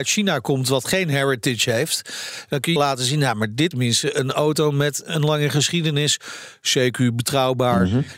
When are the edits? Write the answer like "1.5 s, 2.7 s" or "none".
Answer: 2.8 s, 3.7 s